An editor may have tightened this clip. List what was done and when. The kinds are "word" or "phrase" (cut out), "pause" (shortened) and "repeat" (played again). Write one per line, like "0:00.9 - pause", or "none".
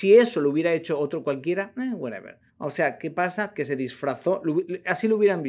0:02.5 - pause